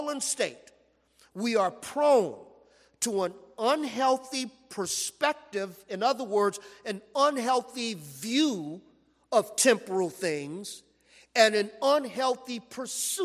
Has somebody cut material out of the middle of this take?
no; 0 cuts

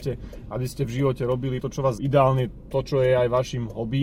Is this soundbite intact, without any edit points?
no; 2 cuts; at 1.6 s, 2.0 s

